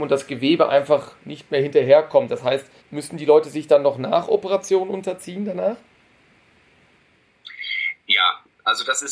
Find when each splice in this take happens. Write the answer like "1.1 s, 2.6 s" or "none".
2.8 s